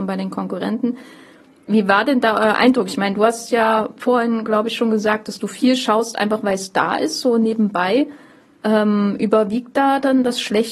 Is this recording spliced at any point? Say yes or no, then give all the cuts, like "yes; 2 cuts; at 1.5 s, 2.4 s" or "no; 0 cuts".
no; 0 cuts